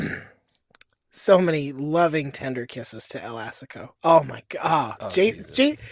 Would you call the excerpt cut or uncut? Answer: cut